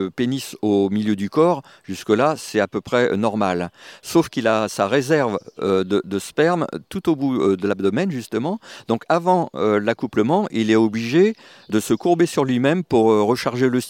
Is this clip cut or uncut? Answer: uncut